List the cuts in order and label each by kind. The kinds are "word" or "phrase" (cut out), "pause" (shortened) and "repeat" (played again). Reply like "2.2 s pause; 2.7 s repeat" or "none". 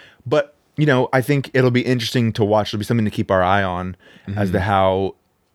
none